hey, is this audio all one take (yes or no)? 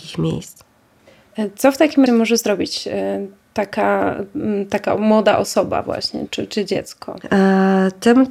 no